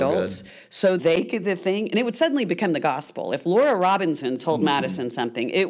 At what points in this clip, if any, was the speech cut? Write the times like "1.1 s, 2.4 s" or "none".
1.0 s, 1.4 s

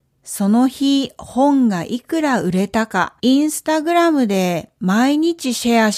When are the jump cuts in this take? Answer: 3.2 s

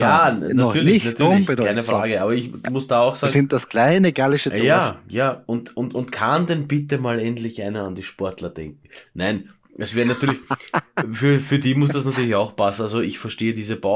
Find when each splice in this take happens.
none

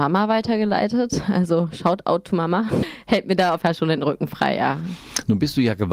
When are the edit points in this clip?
2.8 s, 3.6 s

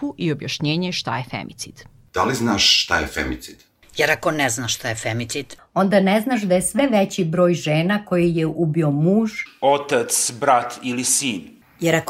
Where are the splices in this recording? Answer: none

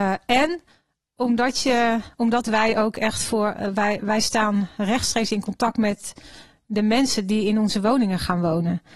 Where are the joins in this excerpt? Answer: none

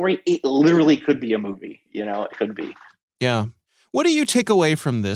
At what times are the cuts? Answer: 2.3 s

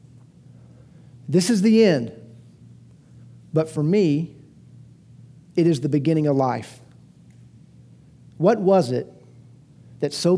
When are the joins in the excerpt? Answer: none

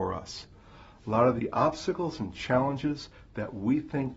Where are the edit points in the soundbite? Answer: none

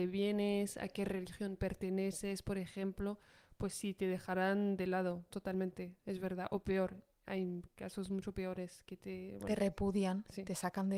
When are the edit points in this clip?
none

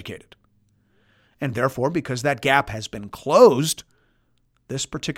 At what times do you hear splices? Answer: none

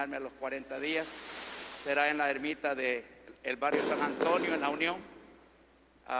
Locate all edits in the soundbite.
none

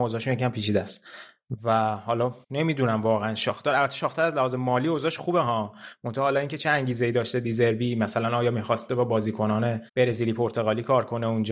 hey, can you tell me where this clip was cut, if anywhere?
2.4 s, 9.9 s

